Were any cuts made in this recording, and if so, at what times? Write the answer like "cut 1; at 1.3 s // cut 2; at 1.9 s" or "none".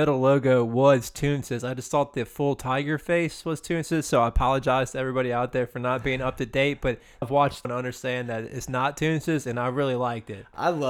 cut 1; at 7.2 s // cut 2; at 7.6 s